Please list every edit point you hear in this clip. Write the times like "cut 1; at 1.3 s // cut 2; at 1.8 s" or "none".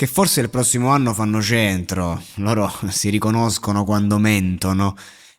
none